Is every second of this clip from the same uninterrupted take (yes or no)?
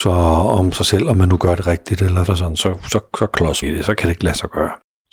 no